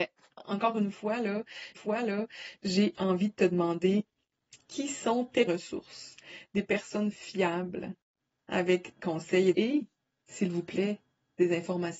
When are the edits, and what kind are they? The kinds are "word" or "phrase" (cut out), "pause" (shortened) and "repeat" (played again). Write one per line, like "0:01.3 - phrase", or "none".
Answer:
0:01.7 - repeat
0:05.5 - word
0:09.0 - word
0:09.5 - phrase